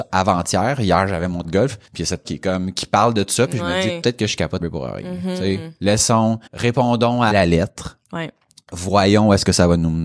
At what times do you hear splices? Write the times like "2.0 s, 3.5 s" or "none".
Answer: 1.4 s, 1.8 s, 2.2 s, 4.0 s, 4.6 s, 6.5 s, 7.3 s, 8.0 s